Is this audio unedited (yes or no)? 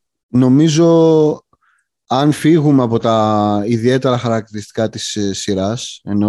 yes